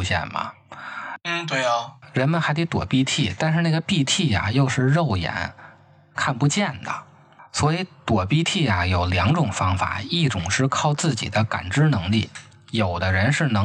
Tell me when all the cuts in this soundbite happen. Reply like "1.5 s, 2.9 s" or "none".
none